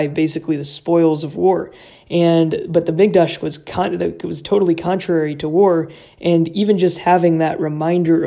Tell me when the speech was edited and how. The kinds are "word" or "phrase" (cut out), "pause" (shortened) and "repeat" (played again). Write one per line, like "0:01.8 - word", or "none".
none

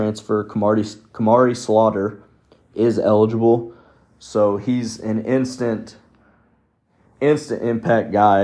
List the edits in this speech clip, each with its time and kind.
none

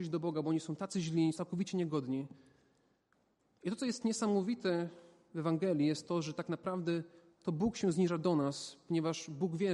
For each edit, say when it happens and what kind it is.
0:01.3 - word

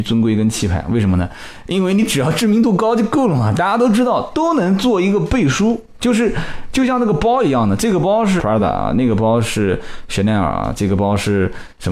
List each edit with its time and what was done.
none

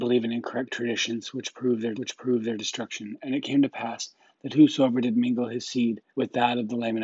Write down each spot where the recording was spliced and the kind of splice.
0:01.9 - repeat
0:06.1 - pause

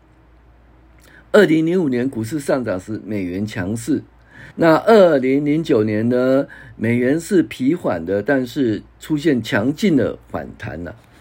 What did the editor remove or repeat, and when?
0:04.5 - pause

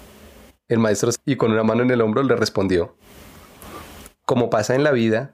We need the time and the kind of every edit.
0:01.2 - word

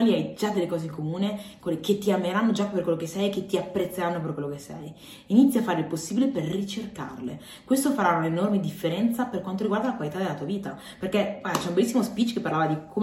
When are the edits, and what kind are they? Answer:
none

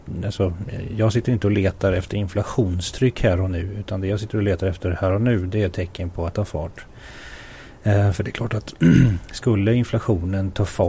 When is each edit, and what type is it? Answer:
0:06.3 - word

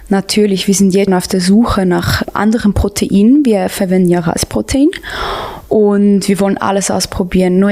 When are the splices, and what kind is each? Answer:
0:01.1 - word
0:02.2 - word

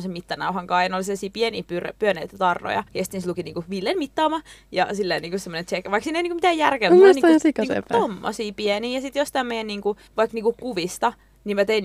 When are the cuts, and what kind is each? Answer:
0:02.9 - pause
0:10.1 - pause

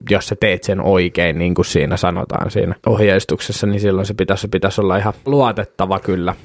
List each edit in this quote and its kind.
0:02.8 - pause
0:04.4 - repeat
0:05.3 - word

